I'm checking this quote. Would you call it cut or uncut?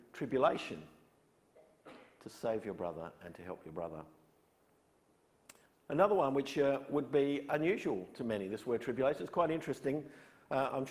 cut